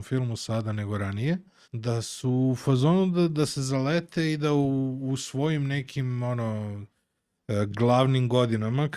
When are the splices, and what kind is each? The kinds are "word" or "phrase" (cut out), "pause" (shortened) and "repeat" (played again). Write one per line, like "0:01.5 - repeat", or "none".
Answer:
0:01.6 - pause